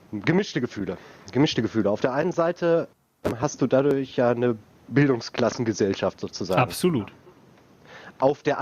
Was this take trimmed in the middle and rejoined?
no; 0 cuts

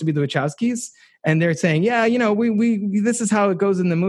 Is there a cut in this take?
no; 0 cuts

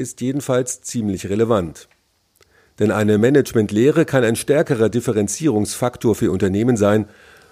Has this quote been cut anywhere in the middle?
no; 0 cuts

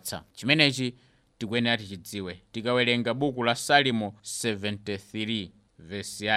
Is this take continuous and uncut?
no; 1 cut; at 4.2 s

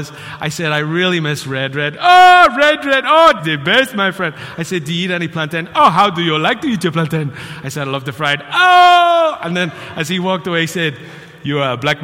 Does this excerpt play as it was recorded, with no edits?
no; 1 cut; at 3.4 s

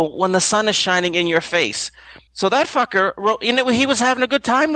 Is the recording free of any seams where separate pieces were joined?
no; 1 cut; at 2.3 s

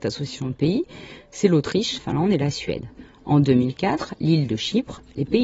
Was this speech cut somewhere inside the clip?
yes; 1 cut; at 2.0 s

